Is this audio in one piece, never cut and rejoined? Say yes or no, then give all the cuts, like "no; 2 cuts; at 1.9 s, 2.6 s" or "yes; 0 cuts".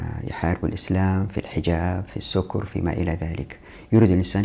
yes; 0 cuts